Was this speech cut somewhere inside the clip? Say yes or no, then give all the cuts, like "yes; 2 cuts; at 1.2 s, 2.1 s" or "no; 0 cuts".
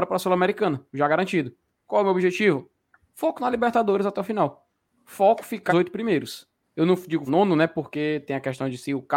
yes; 3 cuts; at 5.7 s, 6.6 s, 7.3 s